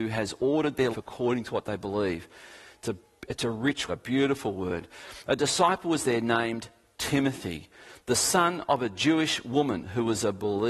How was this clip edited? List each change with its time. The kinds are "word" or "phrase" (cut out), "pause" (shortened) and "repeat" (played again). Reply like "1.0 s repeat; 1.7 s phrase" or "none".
0.9 s word; 3.9 s word